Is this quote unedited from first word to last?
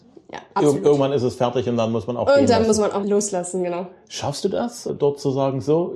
no; 1 cut; at 3.0 s

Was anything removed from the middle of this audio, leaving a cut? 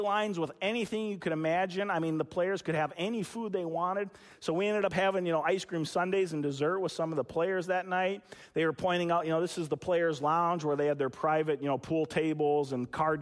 no; 0 cuts

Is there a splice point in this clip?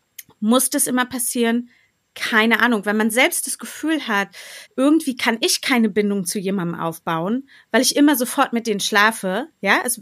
yes; 1 cut; at 4.7 s

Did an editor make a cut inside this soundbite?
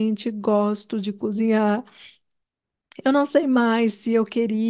no; 0 cuts

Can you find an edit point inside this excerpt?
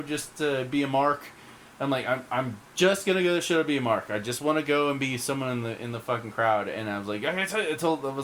no; 0 cuts

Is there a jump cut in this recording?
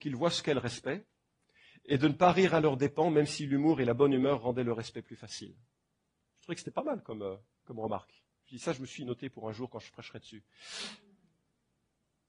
no; 0 cuts

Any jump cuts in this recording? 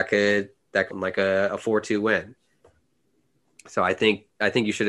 yes; 1 cut; at 0.9 s

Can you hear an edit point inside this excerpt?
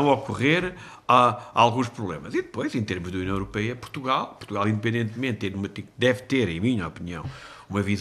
no; 0 cuts

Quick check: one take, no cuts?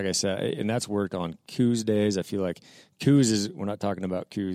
yes; 0 cuts

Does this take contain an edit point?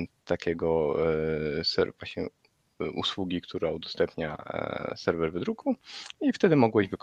no; 0 cuts

